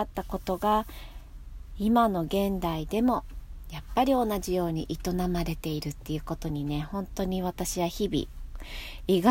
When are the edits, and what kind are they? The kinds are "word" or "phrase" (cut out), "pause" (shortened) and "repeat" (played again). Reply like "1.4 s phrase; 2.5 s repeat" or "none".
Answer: none

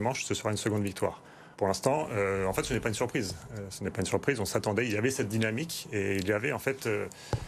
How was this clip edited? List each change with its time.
1.5 s pause

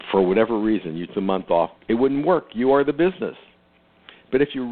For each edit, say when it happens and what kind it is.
1.1 s word; 1.8 s pause

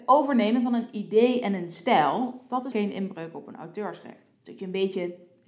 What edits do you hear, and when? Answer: 2.7 s word; 4.3 s pause

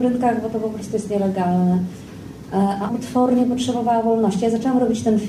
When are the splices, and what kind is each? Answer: 2.9 s word

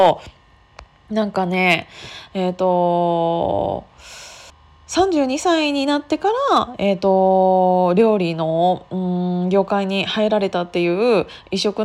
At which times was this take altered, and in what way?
4.5 s pause

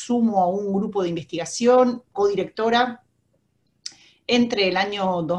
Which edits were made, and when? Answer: 2.1 s word

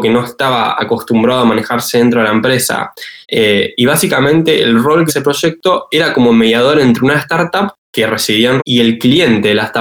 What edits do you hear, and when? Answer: 3.2 s pause; 5.1 s phrase; 7.8 s pause; 8.6 s word

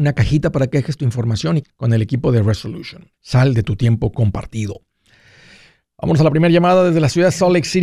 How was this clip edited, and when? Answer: 1.6 s word; 3.1 s pause

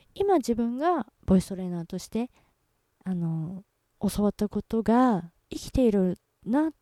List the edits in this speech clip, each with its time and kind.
1.1 s pause

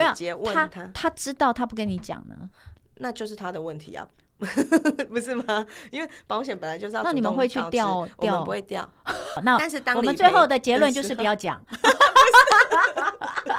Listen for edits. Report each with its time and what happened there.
none

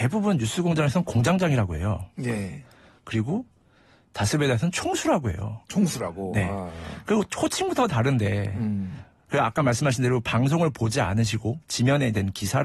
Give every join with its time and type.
none

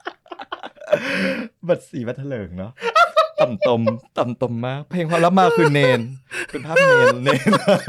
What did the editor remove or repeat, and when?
4.1 s pause

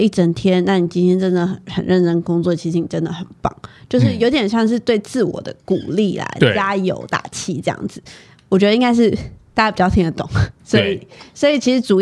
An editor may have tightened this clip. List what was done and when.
10.6 s pause

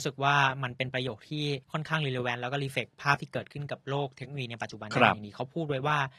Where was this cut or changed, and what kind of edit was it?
1.6 s pause

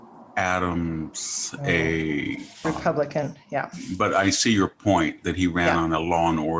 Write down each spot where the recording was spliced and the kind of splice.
none

